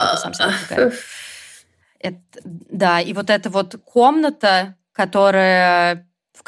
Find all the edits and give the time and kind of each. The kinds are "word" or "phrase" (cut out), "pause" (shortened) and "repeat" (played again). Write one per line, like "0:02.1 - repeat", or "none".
none